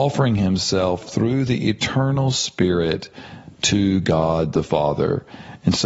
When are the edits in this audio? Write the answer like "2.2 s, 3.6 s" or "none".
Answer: none